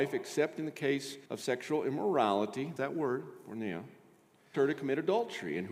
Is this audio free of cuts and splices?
no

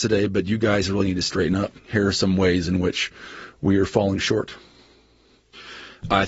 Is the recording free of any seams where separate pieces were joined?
no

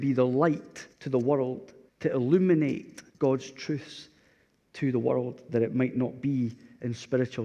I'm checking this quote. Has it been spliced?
yes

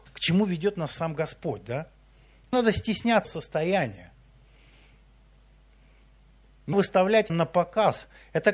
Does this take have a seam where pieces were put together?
yes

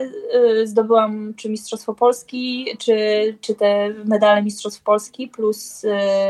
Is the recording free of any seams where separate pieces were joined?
yes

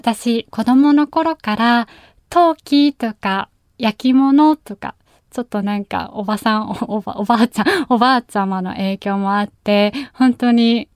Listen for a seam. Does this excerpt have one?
no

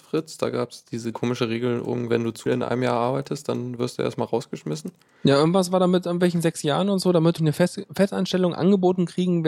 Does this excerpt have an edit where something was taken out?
yes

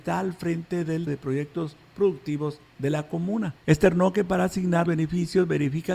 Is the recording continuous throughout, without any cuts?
no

